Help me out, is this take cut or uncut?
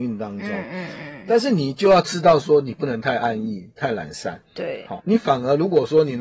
cut